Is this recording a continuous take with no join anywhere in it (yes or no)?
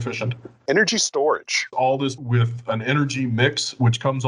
no